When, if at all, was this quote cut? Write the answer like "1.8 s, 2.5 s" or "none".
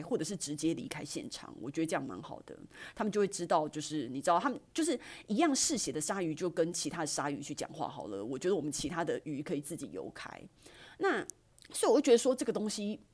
11.5 s